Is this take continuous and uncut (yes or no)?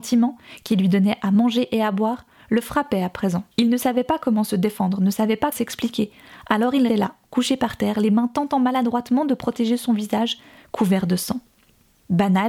no